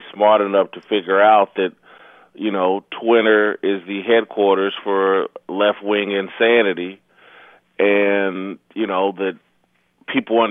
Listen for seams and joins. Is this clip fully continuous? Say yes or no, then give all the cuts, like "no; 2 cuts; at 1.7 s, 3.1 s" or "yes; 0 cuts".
yes; 0 cuts